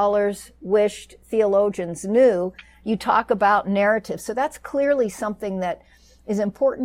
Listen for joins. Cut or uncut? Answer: uncut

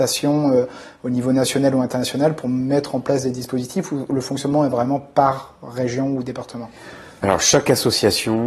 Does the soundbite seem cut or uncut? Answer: uncut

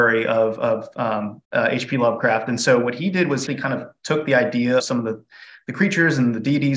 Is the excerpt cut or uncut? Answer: cut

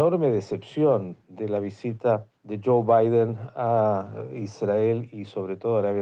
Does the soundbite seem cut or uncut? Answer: cut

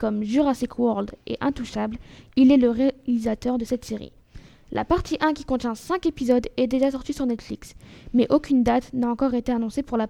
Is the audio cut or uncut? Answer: uncut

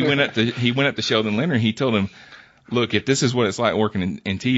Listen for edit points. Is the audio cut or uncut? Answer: uncut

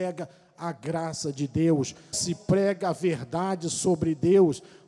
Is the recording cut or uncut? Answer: cut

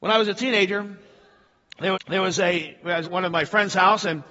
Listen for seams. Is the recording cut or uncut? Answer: cut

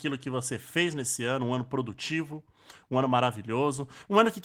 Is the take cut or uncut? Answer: uncut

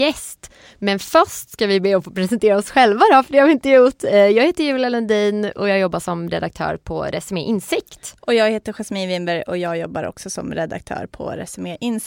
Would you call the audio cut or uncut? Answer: uncut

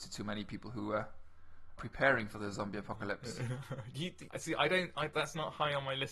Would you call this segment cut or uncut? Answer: cut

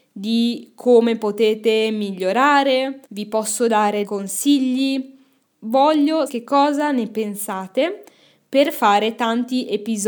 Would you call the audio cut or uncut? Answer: cut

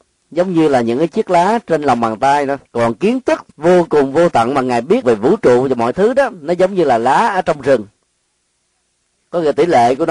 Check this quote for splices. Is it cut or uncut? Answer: cut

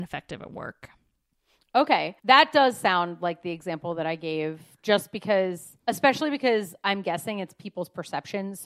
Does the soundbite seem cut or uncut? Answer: cut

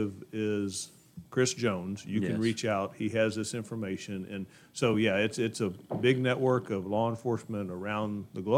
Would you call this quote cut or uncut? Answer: uncut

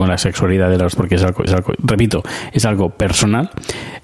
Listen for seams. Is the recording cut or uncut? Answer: cut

